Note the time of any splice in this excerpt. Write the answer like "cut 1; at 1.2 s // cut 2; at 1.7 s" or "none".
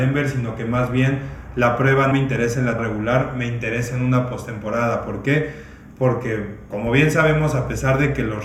cut 1; at 2.1 s // cut 2; at 2.8 s